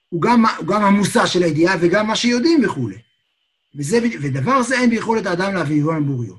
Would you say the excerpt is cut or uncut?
uncut